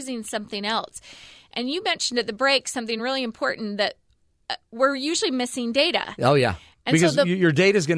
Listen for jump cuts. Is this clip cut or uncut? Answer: uncut